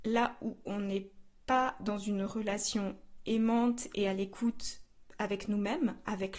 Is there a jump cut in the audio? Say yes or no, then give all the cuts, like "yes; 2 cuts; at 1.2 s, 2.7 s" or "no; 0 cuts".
no; 0 cuts